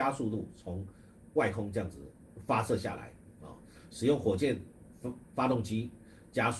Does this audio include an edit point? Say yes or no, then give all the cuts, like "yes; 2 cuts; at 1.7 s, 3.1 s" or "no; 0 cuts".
no; 0 cuts